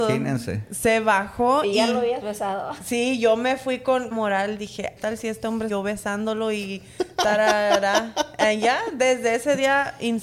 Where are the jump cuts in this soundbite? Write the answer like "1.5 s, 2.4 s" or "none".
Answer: 4.1 s, 5.0 s, 5.7 s